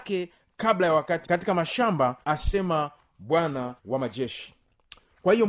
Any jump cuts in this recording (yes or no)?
yes